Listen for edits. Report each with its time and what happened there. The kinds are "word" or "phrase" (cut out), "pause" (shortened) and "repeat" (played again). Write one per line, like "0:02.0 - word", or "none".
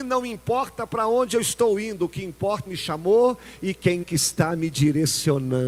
0:02.7 - phrase
0:04.0 - word